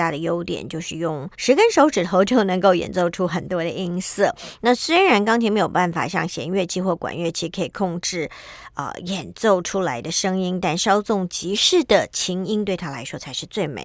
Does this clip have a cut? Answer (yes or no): yes